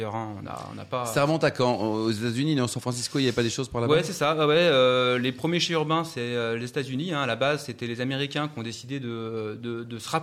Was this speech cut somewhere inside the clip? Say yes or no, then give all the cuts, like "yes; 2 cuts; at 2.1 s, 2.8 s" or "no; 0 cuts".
no; 0 cuts